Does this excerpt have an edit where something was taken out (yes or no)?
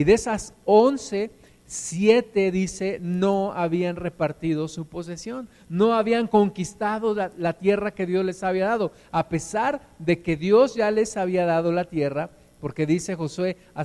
no